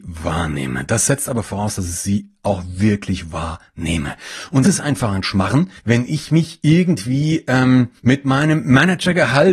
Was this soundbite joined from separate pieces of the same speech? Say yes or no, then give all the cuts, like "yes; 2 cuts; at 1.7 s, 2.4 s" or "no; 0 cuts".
yes; 3 cuts; at 4.6 s, 5.8 s, 8.0 s